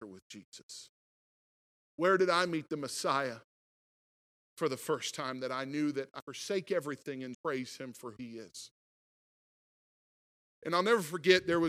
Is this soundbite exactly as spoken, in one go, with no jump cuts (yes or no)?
no